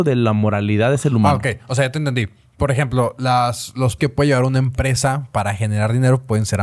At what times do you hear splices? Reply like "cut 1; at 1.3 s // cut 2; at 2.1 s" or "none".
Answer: cut 1; at 4.0 s